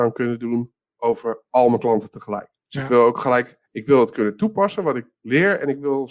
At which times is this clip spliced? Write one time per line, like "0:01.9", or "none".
0:02.6
0:03.7